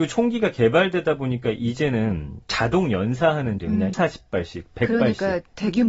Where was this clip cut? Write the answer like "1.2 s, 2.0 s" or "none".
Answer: 2.4 s, 3.6 s, 3.9 s